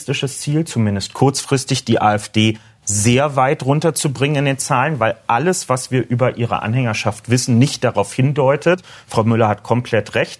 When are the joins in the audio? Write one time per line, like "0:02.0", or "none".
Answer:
none